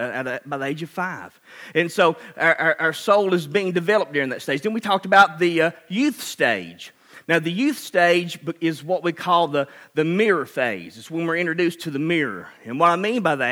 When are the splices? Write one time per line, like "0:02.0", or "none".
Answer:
none